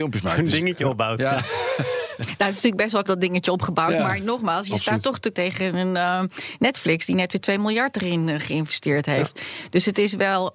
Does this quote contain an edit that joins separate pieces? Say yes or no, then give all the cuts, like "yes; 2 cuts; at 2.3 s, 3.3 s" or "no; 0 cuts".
yes; 2 cuts; at 3.0 s, 5.3 s